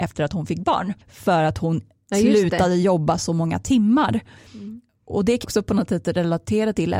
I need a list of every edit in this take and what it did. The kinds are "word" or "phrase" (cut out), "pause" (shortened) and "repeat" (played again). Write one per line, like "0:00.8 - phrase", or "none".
0:01.0 - pause
0:05.4 - word